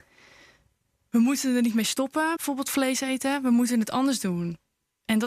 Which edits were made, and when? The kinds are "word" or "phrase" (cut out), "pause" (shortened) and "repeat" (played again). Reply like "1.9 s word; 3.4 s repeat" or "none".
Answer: 2.4 s word